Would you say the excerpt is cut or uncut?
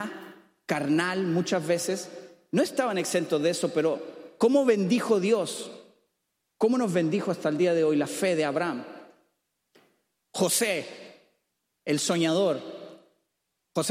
uncut